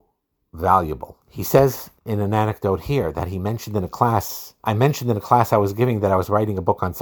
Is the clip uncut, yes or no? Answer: no